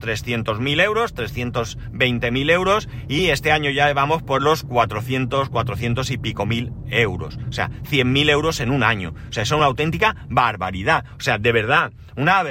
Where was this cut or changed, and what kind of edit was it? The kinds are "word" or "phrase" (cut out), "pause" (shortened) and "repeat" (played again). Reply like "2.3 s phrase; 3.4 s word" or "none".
none